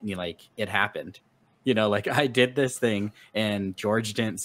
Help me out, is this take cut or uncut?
uncut